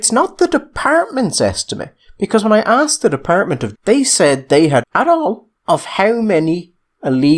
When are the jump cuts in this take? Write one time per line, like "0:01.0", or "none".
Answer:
0:03.8
0:04.8